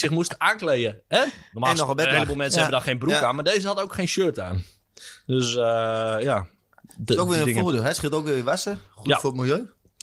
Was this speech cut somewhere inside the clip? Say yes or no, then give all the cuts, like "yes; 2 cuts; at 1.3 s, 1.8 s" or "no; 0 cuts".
no; 0 cuts